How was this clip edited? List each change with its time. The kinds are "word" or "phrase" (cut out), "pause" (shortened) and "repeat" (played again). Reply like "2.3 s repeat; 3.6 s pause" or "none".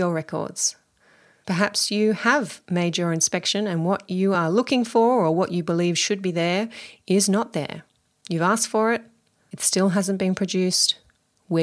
none